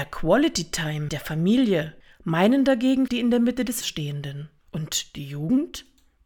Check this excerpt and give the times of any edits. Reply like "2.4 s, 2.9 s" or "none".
1.1 s, 2.0 s, 3.1 s, 3.8 s, 4.6 s